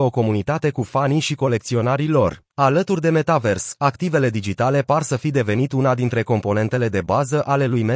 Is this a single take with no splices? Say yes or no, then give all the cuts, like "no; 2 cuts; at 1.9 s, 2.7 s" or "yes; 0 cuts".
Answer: no; 1 cut; at 2.5 s